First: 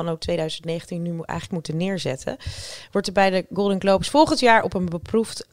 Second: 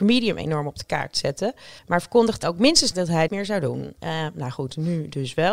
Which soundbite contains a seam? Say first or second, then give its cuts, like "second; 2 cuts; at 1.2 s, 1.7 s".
second; 4 cuts; at 1.8 s, 2.4 s, 2.9 s, 3.3 s